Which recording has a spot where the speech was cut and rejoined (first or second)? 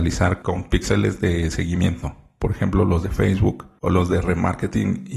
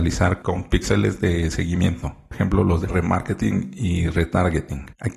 second